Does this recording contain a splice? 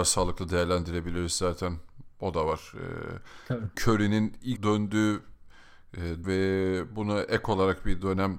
yes; 3 cuts; at 3.7 s, 4.6 s, 6.2 s

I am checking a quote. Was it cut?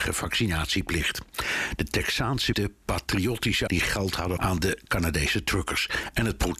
yes; 3 cuts; at 2.5 s, 3.7 s, 4.4 s

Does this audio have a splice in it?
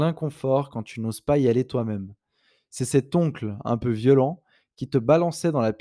no; 0 cuts

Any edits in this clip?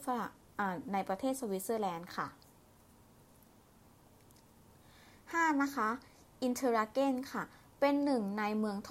no; 0 cuts

